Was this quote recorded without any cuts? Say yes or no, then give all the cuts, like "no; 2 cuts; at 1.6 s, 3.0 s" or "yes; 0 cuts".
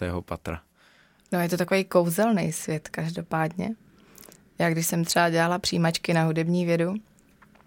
yes; 0 cuts